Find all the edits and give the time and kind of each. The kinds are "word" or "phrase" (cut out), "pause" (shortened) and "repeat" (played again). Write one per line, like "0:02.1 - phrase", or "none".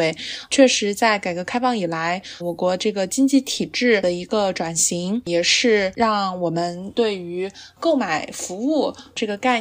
0:02.4 - word